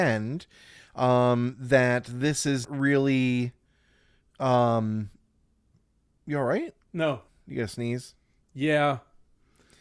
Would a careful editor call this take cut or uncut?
cut